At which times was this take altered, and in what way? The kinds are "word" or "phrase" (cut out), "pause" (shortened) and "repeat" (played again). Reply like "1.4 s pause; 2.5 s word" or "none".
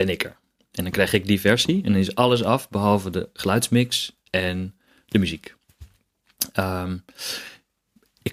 none